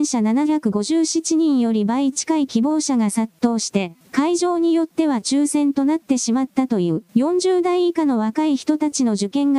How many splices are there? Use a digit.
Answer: 2